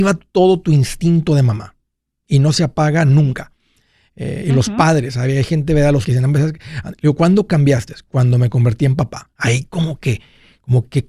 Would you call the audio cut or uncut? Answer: cut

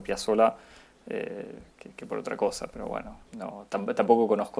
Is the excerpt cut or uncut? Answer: cut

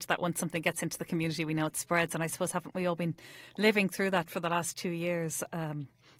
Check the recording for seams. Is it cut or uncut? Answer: uncut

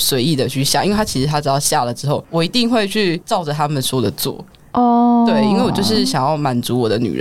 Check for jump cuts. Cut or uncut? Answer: uncut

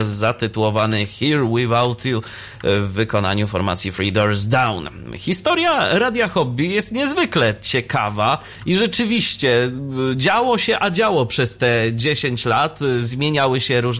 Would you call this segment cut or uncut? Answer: uncut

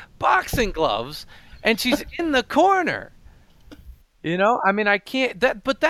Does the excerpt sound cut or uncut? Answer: uncut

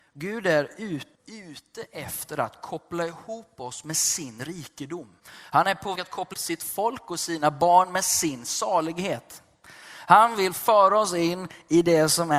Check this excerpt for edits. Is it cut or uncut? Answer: cut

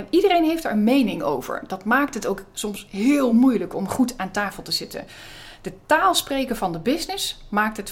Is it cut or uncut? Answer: uncut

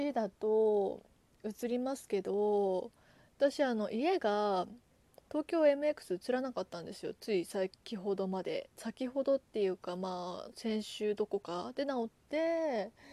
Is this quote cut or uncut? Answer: uncut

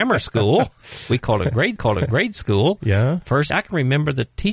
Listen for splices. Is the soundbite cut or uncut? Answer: cut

